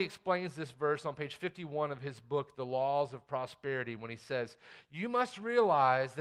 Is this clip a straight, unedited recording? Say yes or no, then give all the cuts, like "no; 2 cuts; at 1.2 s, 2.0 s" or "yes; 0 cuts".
yes; 0 cuts